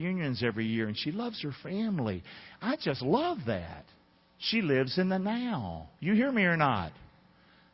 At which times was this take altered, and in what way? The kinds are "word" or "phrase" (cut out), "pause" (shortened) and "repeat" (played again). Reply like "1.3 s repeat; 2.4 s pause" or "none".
none